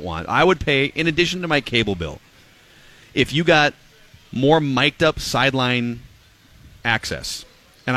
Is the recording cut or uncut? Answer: uncut